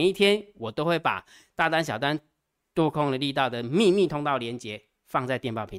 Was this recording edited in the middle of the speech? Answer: no; 0 cuts

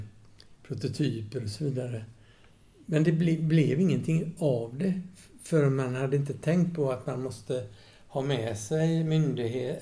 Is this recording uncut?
yes; 0 cuts

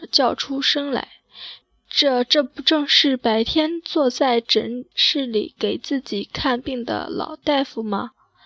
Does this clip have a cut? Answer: yes; 1 cut; at 1.6 s

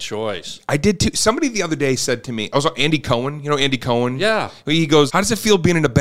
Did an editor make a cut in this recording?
yes; 1 cut; at 5.1 s

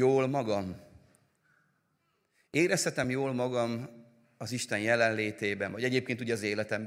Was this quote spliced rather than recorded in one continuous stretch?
no; 0 cuts

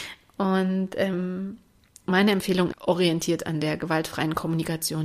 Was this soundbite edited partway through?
yes; 1 cut; at 2.7 s

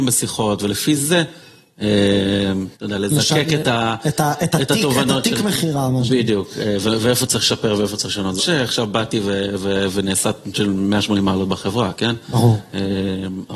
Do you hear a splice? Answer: yes; 3 cuts; at 2.7 s, 8.4 s, 10.5 s

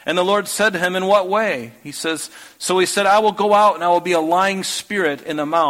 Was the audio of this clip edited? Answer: no; 0 cuts

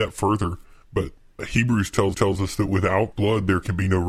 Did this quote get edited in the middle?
yes; 3 cuts; at 1.4 s, 2.1 s, 3.1 s

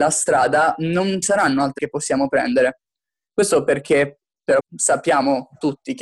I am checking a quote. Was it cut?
yes; 3 cuts; at 1.2 s, 1.8 s, 4.6 s

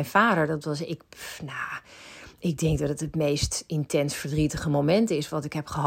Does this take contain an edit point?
no; 0 cuts

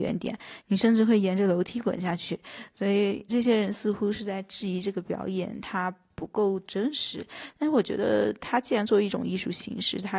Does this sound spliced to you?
yes; 1 cut; at 3.3 s

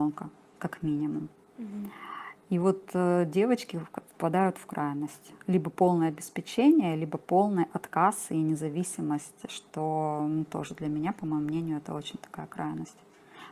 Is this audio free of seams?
yes; 0 cuts

